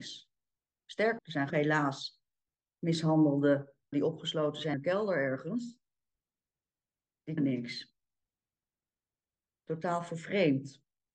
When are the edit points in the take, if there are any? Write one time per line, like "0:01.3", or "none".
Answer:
0:01.2
0:01.5
0:03.9
0:04.7
0:07.4